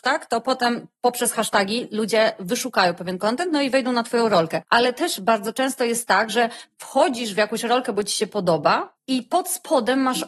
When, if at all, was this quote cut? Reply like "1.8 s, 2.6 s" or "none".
none

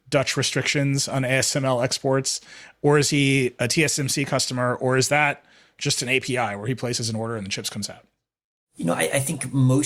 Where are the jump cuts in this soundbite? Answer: none

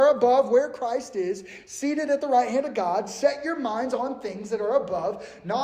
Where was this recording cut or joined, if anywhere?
none

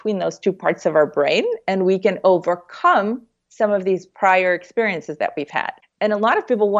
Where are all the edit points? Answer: 5.8 s

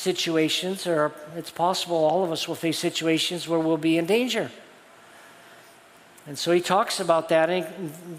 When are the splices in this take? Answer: none

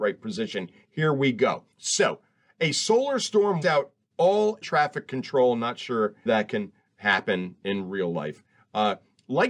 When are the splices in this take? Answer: 1.7 s, 3.6 s, 4.6 s, 6.3 s

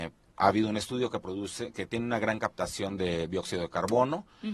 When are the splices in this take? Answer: none

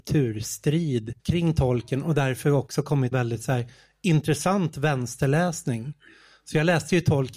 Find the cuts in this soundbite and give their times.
1.2 s, 3.1 s

